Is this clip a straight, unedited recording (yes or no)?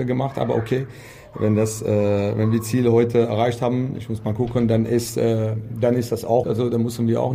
no